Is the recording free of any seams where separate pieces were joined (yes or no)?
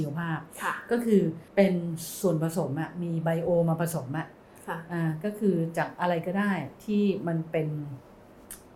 no